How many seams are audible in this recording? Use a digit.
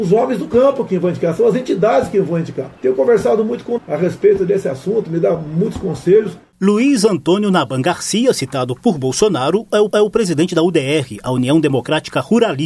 3